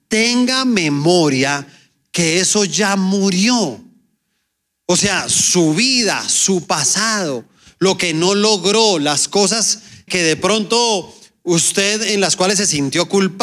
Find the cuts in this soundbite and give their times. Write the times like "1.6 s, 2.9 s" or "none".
10.1 s

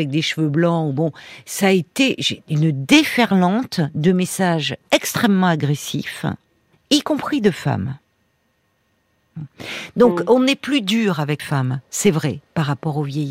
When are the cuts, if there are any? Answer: 4.8 s, 6.7 s, 11.4 s

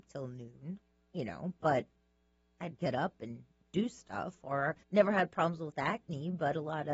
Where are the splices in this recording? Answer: 2.7 s, 4.8 s

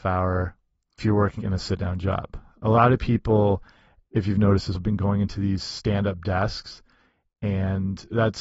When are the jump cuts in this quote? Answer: 1.0 s, 1.4 s, 4.7 s

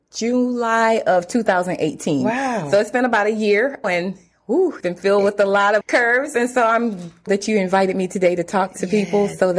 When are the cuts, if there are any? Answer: 3.8 s, 4.8 s, 5.8 s, 7.3 s

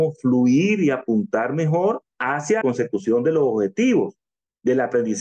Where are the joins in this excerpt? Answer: 2.6 s

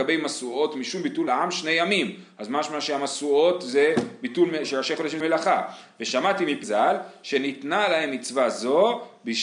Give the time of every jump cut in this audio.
1.3 s, 5.2 s, 6.6 s

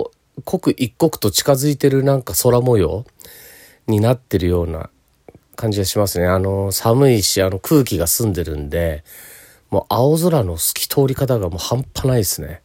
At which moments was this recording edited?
none

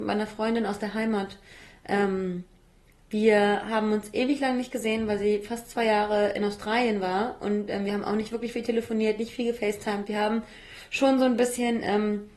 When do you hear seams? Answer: none

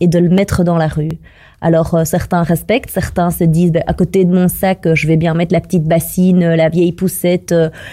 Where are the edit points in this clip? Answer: none

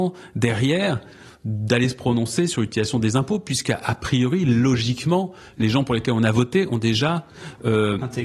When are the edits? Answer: none

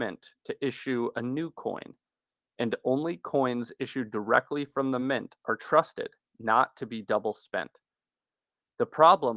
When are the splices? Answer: none

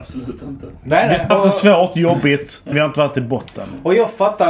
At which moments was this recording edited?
1.3 s, 2.7 s

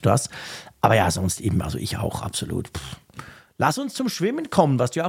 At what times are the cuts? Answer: none

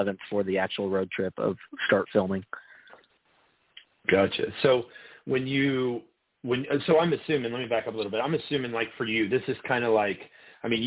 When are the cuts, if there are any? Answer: none

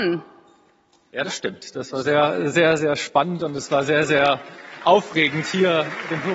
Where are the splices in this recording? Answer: none

